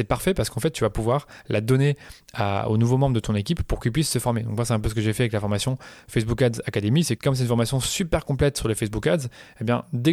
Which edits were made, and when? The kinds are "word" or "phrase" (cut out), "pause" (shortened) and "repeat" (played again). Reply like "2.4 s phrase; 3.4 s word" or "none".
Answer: 7.2 s word

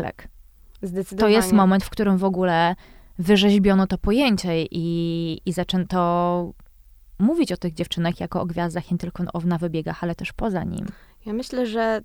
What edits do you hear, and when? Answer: none

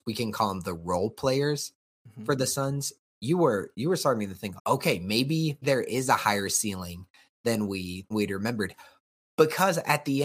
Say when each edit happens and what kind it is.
4.6 s word; 5.6 s word; 8.1 s word

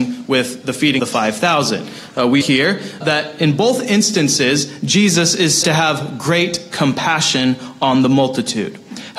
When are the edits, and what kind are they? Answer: 1.0 s word; 2.4 s word; 3.0 s word; 5.6 s word

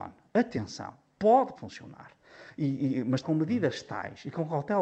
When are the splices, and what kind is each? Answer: 1.6 s word; 3.2 s phrase

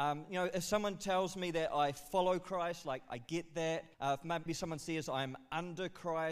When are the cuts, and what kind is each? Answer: 3.9 s pause; 4.5 s word

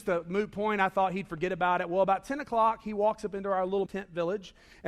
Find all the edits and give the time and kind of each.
3.9 s word

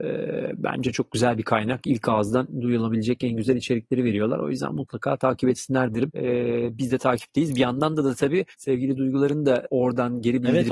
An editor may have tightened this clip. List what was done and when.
8.5 s pause

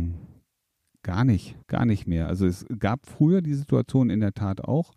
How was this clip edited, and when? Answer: 1.6 s pause

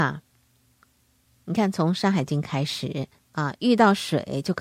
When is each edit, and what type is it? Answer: 3.2 s pause

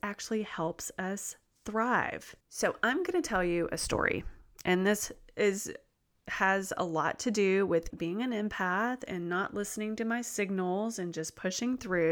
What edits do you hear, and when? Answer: 2.4 s pause; 7.9 s word

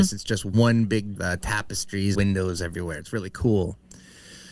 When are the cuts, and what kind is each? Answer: 1.2 s phrase; 2.1 s word

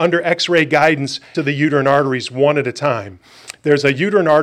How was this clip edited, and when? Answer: 1.3 s word

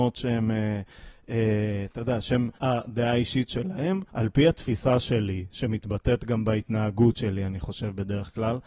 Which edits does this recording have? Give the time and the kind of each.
2.6 s pause; 4.1 s pause

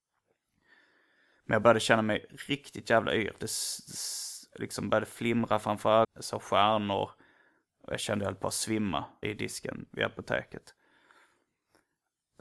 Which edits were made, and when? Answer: 6.0 s word; 9.2 s word

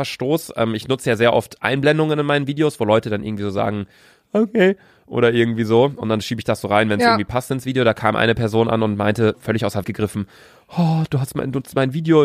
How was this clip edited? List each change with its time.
9.3 s word; 9.8 s word

